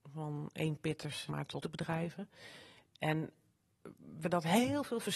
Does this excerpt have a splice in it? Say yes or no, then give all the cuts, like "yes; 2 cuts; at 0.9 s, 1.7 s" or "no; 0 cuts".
yes; 3 cuts; at 1.3 s, 1.6 s, 4.2 s